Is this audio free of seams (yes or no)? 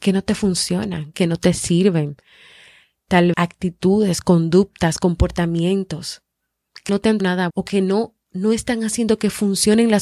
no